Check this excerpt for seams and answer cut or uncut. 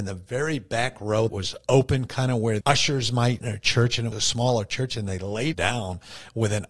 cut